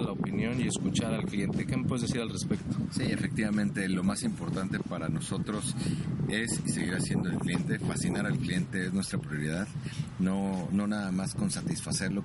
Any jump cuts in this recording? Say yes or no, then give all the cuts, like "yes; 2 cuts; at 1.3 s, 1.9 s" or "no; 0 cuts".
no; 0 cuts